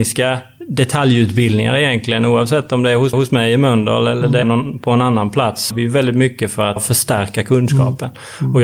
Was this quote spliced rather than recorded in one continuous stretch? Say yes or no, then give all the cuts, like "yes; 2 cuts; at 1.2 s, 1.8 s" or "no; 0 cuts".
yes; 4 cuts; at 3.1 s, 4.4 s, 5.7 s, 6.8 s